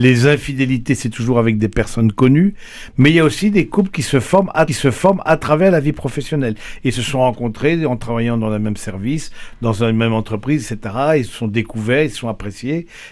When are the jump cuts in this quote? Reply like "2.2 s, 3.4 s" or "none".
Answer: 4.7 s